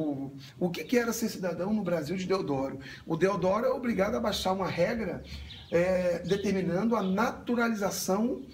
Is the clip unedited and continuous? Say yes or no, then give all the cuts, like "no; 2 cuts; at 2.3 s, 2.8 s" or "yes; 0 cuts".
yes; 0 cuts